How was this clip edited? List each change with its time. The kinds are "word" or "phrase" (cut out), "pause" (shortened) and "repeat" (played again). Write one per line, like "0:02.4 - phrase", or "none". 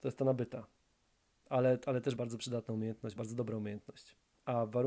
0:02.2 - word
0:03.2 - word